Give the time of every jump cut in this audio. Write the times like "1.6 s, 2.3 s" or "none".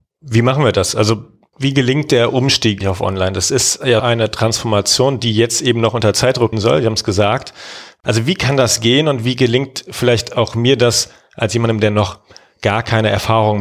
2.8 s, 4.0 s, 6.5 s